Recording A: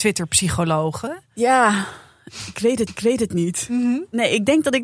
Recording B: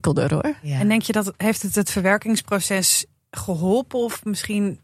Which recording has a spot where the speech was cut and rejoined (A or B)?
A